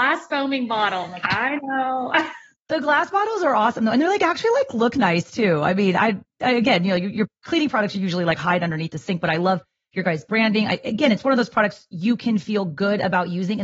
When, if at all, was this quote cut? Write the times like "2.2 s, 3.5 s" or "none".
none